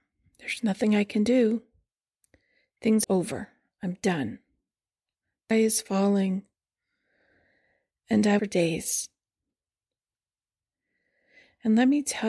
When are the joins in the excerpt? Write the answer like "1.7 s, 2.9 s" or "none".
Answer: 3.0 s, 5.5 s, 8.4 s